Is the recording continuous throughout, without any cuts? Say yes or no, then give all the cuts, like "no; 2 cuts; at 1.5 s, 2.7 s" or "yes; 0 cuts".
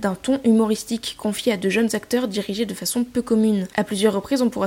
yes; 0 cuts